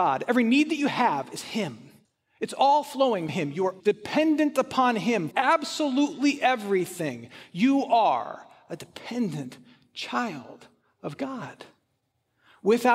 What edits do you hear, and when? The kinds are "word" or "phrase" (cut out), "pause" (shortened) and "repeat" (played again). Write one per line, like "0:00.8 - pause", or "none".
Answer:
0:02.0 - pause
0:03.3 - word
0:03.8 - phrase
0:05.3 - word

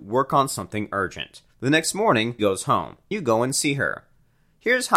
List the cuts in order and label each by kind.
0:01.5 - pause
0:02.4 - word
0:03.1 - word

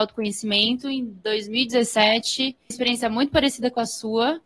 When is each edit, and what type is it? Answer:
0:02.7 - phrase

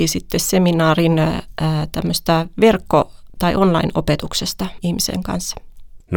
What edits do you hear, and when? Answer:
0:03.4 - word
0:04.8 - word

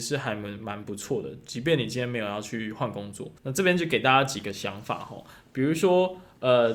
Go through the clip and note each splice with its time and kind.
0:03.4 - pause

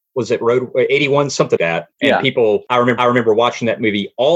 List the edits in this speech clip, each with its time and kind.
0:01.6 - word
0:03.0 - repeat

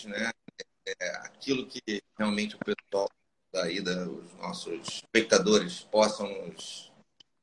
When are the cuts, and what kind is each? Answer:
0:02.1 - pause
0:03.4 - pause
0:05.1 - pause

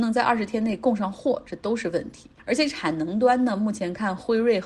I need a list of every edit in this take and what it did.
0:02.4 - pause

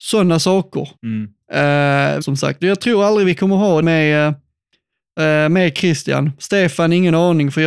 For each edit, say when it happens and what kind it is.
0:01.0 - pause
0:02.2 - word
0:03.8 - word

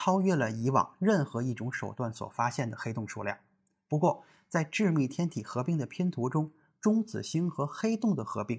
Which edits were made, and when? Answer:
none

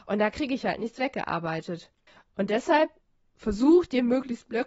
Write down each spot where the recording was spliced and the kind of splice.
0:02.1 - pause
0:03.0 - pause

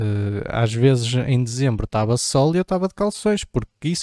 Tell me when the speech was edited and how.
none

